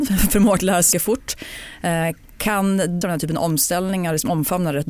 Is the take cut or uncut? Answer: cut